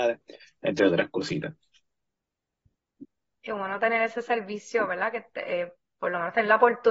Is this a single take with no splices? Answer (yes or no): yes